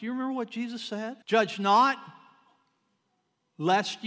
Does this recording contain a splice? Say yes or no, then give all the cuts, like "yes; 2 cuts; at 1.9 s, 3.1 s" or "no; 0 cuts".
yes; 1 cut; at 1.2 s